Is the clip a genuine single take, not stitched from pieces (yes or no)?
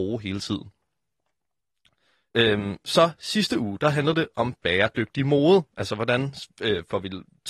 yes